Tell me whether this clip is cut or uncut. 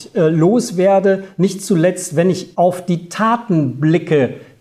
cut